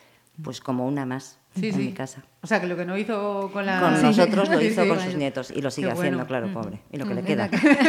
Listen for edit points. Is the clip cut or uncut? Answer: uncut